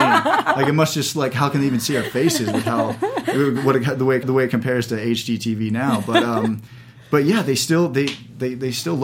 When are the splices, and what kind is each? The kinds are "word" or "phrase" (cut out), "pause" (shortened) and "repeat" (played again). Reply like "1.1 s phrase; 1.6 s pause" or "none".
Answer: 4.2 s repeat